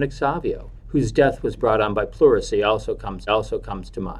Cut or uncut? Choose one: cut